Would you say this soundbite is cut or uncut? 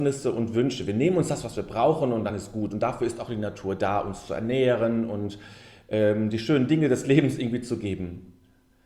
uncut